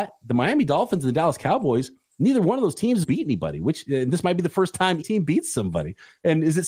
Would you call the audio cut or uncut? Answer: cut